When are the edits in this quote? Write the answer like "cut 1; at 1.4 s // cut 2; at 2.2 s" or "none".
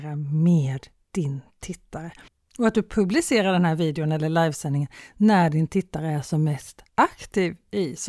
cut 1; at 2.3 s // cut 2; at 6.9 s